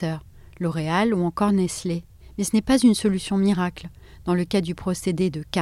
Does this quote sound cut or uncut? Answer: uncut